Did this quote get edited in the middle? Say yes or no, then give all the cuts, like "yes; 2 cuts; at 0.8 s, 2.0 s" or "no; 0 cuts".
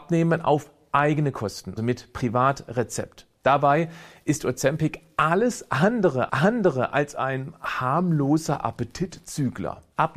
yes; 2 cuts; at 1.8 s, 6.3 s